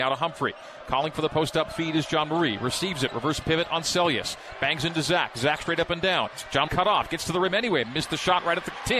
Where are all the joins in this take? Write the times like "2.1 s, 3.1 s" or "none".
6.7 s